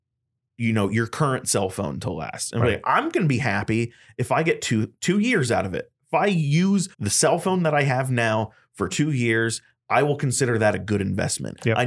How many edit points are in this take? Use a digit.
1